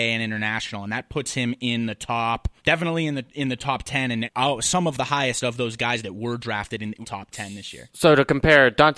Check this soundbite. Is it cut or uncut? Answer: cut